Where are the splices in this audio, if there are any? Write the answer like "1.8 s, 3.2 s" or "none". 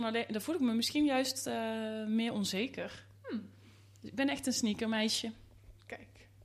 3.1 s